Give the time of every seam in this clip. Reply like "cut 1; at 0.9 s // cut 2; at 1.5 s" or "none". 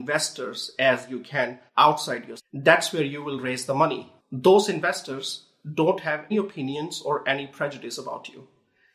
cut 1; at 1.7 s // cut 2; at 2.4 s // cut 3; at 4.2 s // cut 4; at 6.3 s